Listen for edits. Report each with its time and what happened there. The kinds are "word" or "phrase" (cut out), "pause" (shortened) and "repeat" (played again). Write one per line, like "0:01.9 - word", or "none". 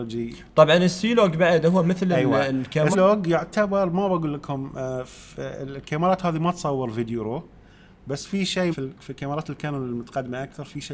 0:02.9 - word
0:08.7 - word